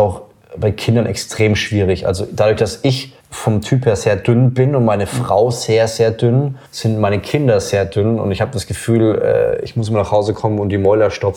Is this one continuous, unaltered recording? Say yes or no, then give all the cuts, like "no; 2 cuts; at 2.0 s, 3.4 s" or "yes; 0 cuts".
no; 2 cuts; at 3.2 s, 6.7 s